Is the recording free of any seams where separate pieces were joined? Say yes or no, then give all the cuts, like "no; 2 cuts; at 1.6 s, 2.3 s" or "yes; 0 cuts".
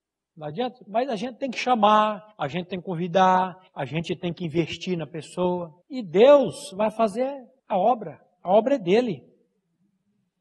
no; 4 cuts; at 2.3 s, 3.7 s, 5.8 s, 7.6 s